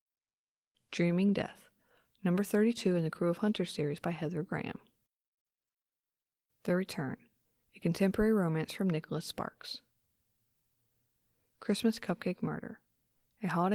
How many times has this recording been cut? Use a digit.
0